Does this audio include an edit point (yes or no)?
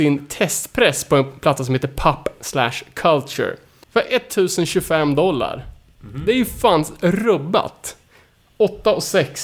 no